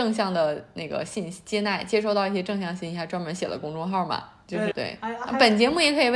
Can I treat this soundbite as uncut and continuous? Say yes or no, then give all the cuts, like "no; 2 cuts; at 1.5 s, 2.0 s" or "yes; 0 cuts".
no; 1 cut; at 4.7 s